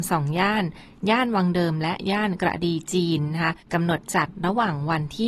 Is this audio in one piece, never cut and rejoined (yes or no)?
no